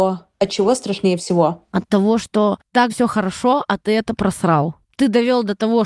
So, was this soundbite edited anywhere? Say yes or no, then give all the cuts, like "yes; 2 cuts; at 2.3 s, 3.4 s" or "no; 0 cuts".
yes; 1 cut; at 2.9 s